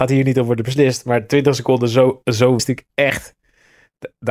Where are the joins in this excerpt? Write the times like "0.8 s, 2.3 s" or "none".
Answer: 2.6 s